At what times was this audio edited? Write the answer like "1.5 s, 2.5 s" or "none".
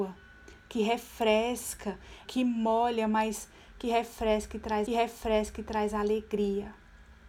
2.3 s, 4.9 s